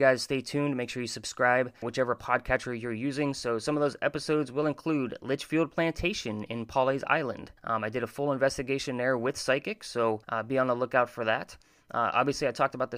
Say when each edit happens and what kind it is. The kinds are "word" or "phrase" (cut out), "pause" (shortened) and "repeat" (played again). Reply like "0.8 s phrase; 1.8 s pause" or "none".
1.8 s word; 7.6 s pause; 10.2 s pause